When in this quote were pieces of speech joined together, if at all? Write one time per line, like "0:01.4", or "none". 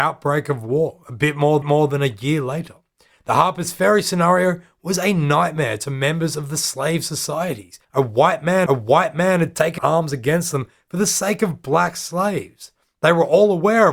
0:01.6
0:07.8
0:08.7
0:09.8